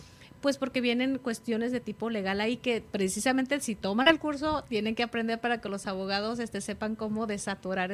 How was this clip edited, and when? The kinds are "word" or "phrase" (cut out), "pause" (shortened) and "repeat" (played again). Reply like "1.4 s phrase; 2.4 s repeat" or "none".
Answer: none